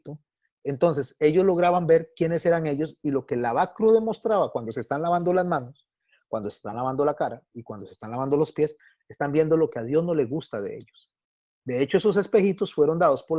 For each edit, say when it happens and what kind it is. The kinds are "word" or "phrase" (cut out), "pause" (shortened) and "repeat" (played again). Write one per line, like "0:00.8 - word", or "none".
none